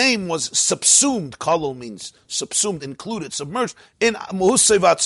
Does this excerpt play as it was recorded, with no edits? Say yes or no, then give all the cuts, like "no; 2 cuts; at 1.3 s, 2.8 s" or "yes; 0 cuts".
yes; 0 cuts